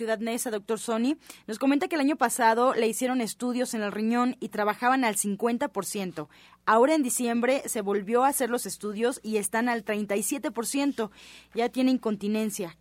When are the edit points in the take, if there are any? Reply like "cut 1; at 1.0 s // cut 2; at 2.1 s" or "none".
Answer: none